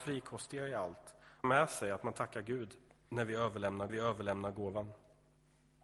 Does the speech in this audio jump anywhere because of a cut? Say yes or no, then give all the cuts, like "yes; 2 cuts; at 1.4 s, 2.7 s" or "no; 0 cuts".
yes; 3 cuts; at 1.4 s, 2.9 s, 3.9 s